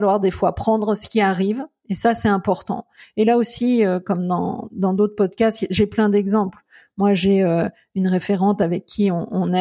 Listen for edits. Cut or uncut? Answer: uncut